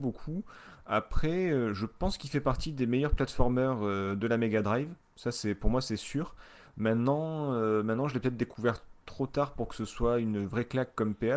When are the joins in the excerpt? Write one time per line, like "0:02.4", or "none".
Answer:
none